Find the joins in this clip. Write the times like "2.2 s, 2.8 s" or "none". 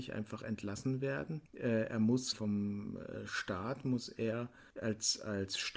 1.5 s, 2.3 s, 4.7 s